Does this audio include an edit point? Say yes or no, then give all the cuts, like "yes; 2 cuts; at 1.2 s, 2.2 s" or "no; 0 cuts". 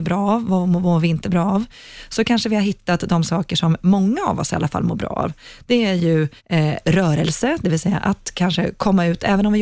yes; 1 cut; at 6.4 s